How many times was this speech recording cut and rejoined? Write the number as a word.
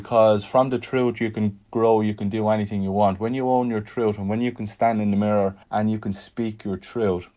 one